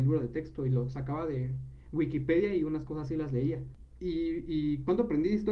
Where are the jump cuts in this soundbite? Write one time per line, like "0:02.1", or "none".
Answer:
none